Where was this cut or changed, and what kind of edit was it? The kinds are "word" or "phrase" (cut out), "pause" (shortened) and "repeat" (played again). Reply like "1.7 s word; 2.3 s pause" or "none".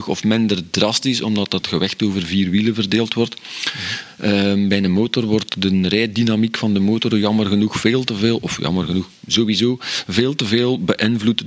none